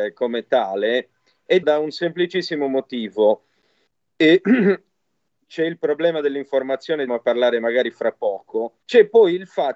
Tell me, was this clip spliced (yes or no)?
yes